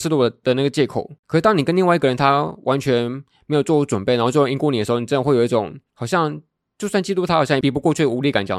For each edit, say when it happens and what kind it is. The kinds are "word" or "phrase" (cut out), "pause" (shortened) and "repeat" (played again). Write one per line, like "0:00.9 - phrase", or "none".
0:01.2 - pause
0:05.9 - pause